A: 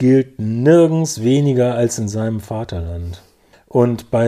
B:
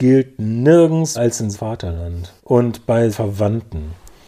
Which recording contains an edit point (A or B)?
B